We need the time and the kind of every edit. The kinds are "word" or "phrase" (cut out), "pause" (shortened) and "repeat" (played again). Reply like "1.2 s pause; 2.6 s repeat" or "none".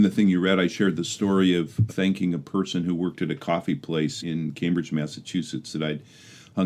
1.9 s word; 4.2 s word

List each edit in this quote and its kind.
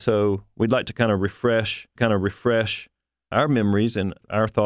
2.0 s repeat

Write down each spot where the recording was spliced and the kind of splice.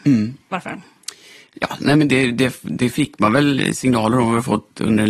none

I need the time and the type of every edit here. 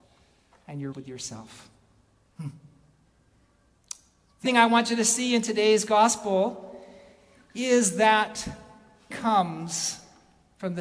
0.9 s word; 4.4 s word; 9.1 s word

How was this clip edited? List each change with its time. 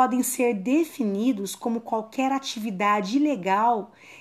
none

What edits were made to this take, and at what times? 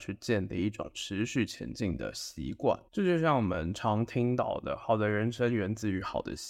2.9 s pause

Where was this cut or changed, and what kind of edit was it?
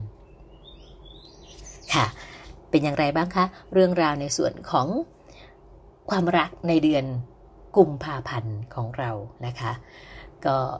7.7 s pause; 9.4 s pause

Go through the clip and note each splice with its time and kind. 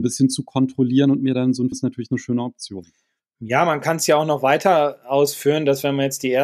1.7 s phrase

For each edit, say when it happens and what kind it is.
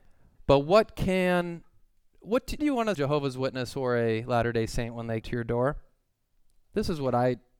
2.6 s word; 2.9 s phrase; 5.2 s word

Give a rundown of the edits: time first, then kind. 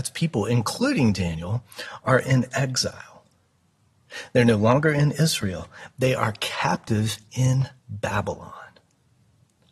7.8 s pause

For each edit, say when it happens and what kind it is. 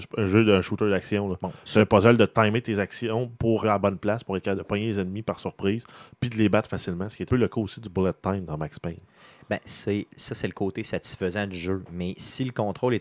3.6 s word; 7.3 s word; 10.1 s word

